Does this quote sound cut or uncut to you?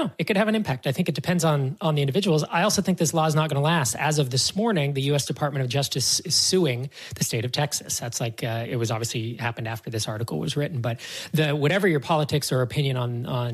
uncut